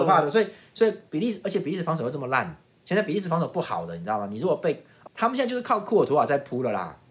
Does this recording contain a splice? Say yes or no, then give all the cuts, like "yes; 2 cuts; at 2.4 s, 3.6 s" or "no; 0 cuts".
yes; 1 cut; at 5.1 s